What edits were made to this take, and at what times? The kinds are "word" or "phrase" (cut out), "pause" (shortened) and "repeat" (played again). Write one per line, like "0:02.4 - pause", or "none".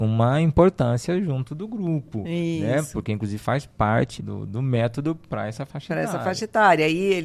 0:04.2 - word